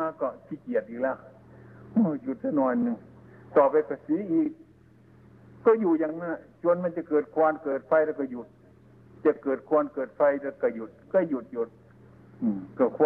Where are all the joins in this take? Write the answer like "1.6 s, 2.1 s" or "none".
none